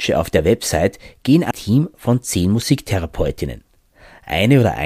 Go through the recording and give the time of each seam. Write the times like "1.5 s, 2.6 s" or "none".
1.5 s